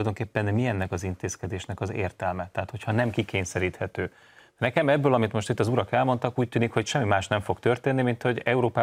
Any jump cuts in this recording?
no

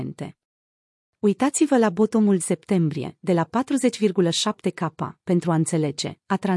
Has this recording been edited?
yes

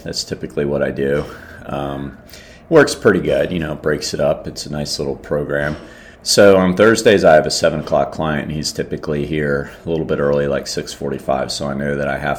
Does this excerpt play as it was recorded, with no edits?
no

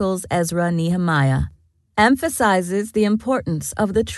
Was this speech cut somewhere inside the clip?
no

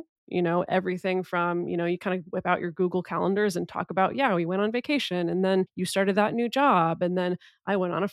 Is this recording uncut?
yes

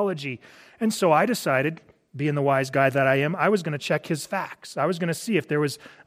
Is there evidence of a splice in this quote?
no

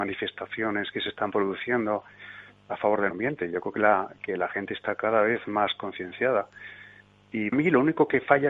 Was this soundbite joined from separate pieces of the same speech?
yes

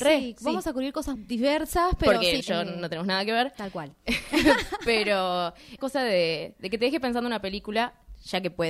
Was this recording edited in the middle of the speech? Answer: yes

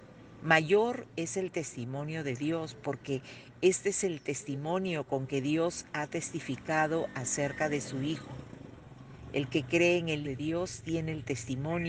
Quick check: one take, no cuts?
no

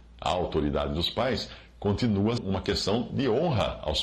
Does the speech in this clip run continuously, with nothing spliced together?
no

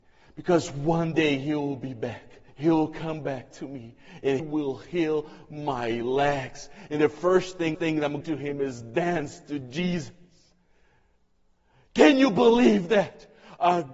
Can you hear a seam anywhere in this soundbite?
yes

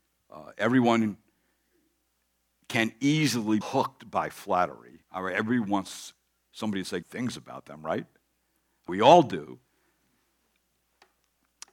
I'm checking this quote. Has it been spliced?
yes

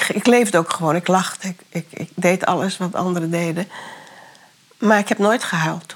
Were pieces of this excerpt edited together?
no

